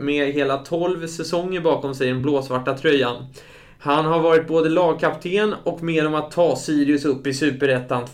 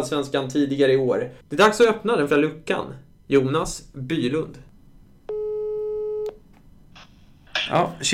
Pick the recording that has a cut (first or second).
second